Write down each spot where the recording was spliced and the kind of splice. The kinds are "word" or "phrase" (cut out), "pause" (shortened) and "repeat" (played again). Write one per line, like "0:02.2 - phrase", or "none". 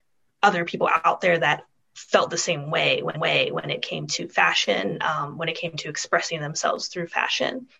0:03.1 - repeat